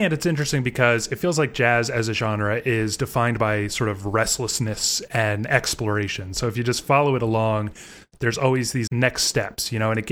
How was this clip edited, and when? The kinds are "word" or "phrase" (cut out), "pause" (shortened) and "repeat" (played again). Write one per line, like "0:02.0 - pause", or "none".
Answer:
0:08.9 - word